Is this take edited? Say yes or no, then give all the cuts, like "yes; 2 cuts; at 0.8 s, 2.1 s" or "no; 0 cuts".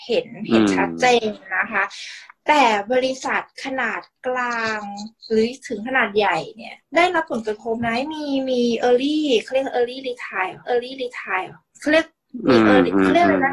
yes; 3 cuts; at 5.2 s, 6.8 s, 10.6 s